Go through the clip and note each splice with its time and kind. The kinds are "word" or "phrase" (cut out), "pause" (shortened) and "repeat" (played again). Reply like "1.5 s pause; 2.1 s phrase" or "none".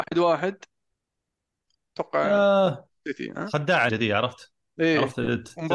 3.9 s word

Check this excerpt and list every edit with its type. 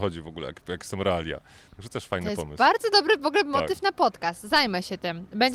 none

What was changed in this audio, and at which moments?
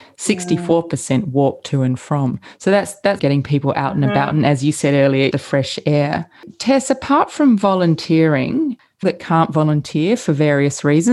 3.2 s phrase; 5.3 s word; 9.0 s word

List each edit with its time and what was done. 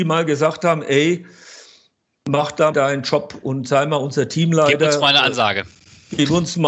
2.7 s word

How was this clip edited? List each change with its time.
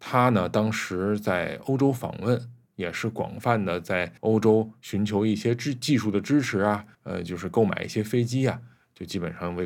4.2 s pause; 6.9 s pause

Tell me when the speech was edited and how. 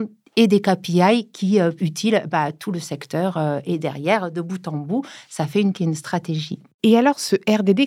1.8 s phrase; 5.7 s word

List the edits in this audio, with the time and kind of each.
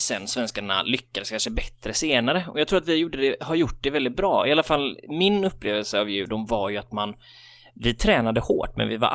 none

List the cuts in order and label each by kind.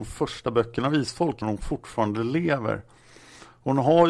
1.4 s word

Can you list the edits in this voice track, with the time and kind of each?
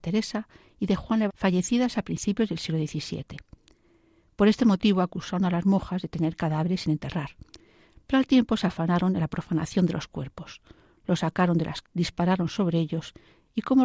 1.3 s word; 11.8 s word

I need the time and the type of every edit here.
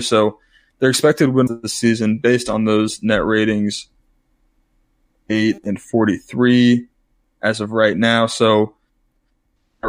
1.5 s word

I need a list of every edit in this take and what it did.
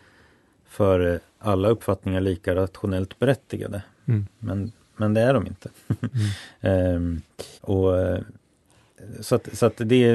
7.6 s pause

